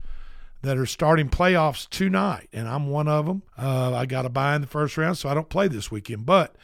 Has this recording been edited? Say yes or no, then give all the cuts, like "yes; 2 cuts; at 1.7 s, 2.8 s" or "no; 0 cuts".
yes; 1 cut; at 3.5 s